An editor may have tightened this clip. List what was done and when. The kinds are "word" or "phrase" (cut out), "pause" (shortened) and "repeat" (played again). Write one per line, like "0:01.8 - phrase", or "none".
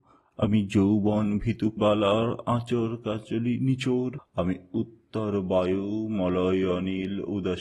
0:01.8 - word